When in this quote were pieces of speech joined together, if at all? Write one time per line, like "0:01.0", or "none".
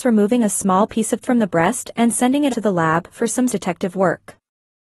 0:01.2
0:02.5
0:03.5